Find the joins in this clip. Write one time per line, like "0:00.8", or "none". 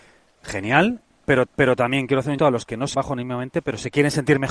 0:01.5
0:02.4
0:02.9